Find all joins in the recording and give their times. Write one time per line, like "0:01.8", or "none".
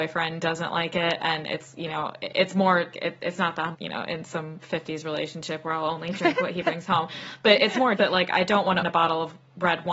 0:02.9
0:03.7
0:04.6
0:08.0
0:08.8